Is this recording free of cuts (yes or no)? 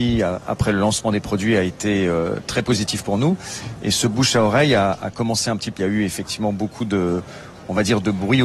no